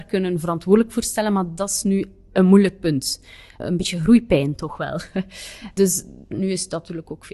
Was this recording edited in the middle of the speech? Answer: no; 0 cuts

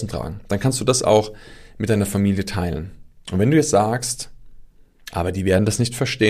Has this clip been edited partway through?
no; 0 cuts

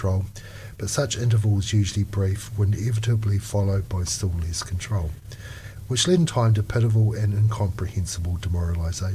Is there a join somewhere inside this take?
no; 0 cuts

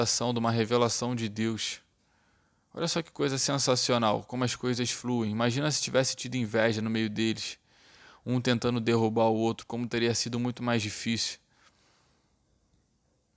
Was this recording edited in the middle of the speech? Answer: no; 0 cuts

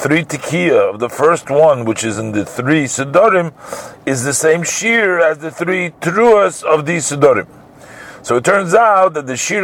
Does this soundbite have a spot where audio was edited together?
no; 0 cuts

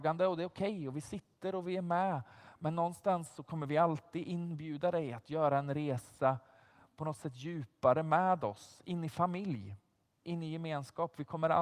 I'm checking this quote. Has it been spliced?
no; 0 cuts

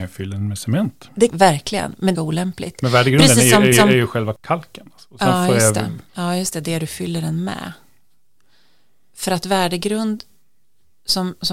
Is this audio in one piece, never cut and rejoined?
no; 4 cuts; at 1.3 s, 2.1 s, 3.7 s, 6.1 s

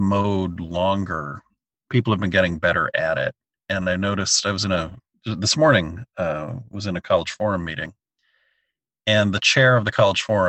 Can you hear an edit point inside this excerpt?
no; 0 cuts

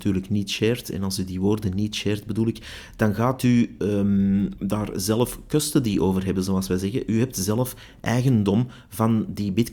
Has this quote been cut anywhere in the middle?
no; 0 cuts

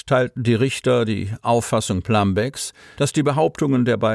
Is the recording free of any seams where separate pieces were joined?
yes; 0 cuts

